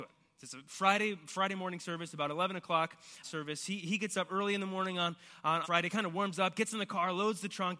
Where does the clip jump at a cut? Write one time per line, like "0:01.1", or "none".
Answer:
0:03.2
0:05.6